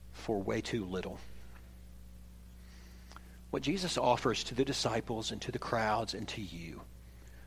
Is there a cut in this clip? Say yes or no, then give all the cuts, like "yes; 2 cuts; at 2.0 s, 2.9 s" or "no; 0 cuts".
no; 0 cuts